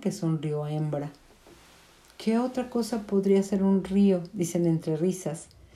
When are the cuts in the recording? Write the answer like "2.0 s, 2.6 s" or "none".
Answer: none